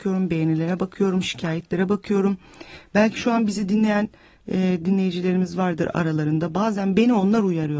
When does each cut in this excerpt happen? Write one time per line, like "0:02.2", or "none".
none